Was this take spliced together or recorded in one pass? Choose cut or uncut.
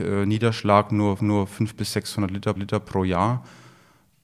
cut